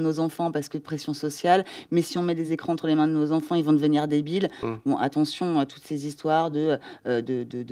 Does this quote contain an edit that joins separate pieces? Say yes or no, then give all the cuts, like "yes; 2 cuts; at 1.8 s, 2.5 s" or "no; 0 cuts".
no; 0 cuts